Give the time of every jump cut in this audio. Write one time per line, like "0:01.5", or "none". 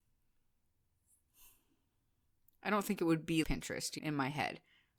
0:03.4
0:04.0